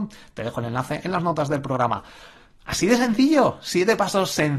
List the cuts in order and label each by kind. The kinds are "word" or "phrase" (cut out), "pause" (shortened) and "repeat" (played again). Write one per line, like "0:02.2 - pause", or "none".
none